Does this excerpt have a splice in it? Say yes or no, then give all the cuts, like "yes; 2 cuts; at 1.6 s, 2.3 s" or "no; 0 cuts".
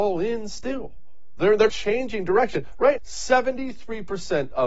yes; 2 cuts; at 1.7 s, 3.0 s